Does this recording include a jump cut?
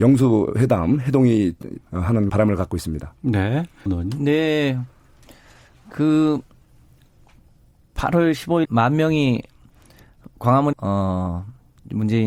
yes; 5 cuts; at 1.8 s, 2.3 s, 3.9 s, 8.6 s, 10.7 s

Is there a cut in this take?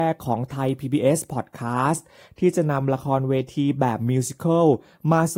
no; 0 cuts

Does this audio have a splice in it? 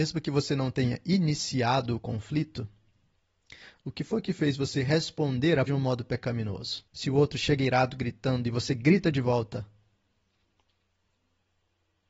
yes; 2 cuts; at 5.7 s, 6.9 s

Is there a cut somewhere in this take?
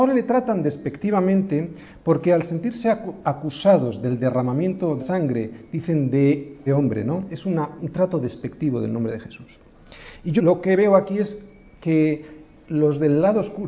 yes; 4 cuts; at 5.0 s, 6.7 s, 7.8 s, 10.4 s

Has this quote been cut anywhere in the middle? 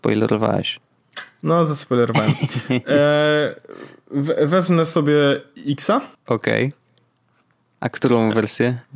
yes; 1 cut; at 6.1 s

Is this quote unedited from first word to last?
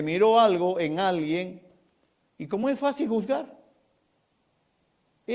yes; 0 cuts

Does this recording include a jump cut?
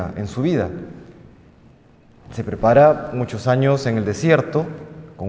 no; 0 cuts

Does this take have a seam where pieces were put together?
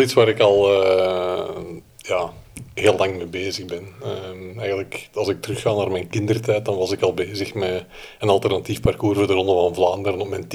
no; 0 cuts

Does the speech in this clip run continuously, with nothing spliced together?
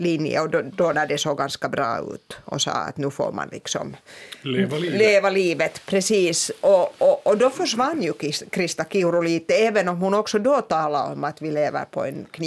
yes; 0 cuts

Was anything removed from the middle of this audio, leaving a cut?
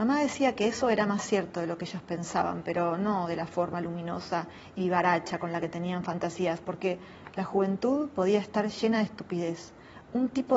no; 0 cuts

